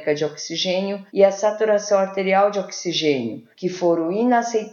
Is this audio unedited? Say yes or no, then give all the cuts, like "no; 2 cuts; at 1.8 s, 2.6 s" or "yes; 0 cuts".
no; 2 cuts; at 1.1 s, 3.5 s